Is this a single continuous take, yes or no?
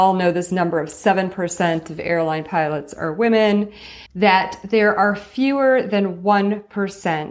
no